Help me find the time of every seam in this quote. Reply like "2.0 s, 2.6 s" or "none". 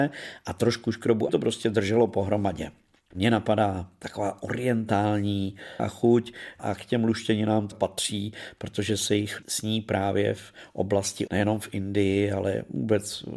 1.3 s, 3.1 s, 5.8 s, 7.7 s, 9.4 s, 11.3 s

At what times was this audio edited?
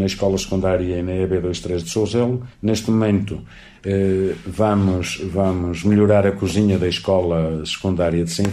2.5 s

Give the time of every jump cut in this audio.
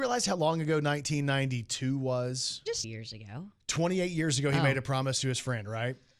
2.8 s

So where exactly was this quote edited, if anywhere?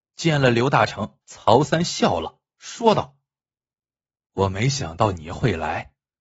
1.2 s, 2.5 s, 3.4 s

